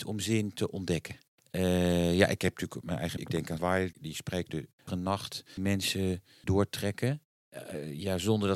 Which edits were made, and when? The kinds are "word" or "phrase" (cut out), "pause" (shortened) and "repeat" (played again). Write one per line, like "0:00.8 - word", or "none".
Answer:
0:02.8 - word
0:03.2 - word
0:03.6 - word
0:03.9 - word
0:04.5 - word
0:04.9 - word
0:05.6 - word
0:06.4 - word